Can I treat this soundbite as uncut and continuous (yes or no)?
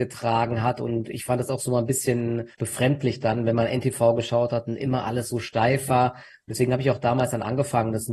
no